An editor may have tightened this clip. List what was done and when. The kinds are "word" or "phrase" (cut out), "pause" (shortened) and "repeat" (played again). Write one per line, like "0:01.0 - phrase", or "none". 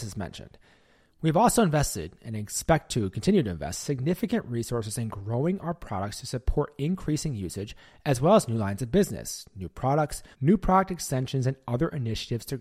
0:10.3 - pause